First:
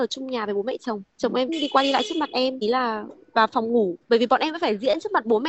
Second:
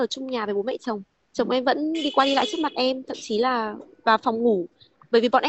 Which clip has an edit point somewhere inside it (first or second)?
first